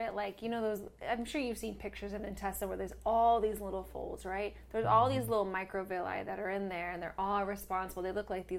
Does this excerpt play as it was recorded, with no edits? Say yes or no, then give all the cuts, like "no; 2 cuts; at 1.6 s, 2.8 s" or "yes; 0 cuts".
yes; 0 cuts